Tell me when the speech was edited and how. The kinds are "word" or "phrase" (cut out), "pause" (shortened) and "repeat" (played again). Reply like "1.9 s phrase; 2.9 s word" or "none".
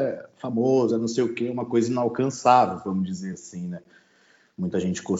none